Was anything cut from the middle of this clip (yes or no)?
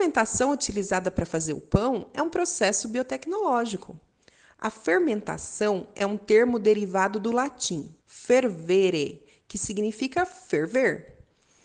yes